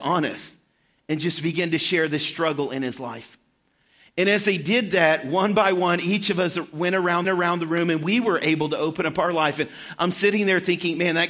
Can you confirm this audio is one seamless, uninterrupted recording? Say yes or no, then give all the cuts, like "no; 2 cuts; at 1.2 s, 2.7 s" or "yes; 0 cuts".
no; 1 cut; at 7.2 s